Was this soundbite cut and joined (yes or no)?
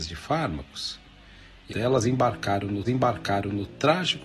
yes